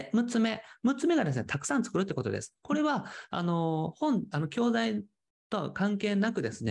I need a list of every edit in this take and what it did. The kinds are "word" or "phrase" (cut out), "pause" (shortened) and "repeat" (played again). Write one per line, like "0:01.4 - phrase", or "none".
none